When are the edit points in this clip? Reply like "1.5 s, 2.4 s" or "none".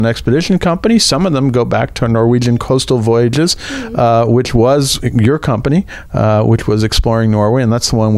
none